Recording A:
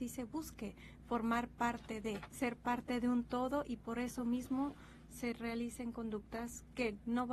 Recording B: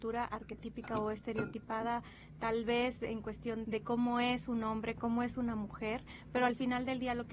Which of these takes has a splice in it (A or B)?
B